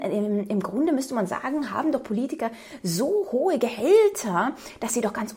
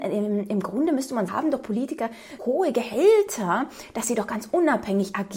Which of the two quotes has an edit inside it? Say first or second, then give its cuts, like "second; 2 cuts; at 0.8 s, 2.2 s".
second; 2 cuts; at 1.3 s, 2.4 s